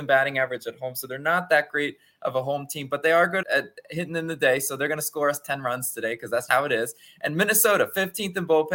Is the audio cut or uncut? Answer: cut